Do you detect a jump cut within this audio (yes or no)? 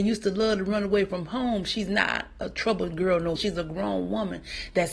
yes